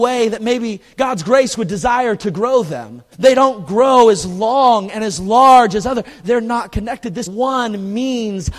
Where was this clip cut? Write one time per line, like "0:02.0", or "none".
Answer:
0:03.1
0:07.3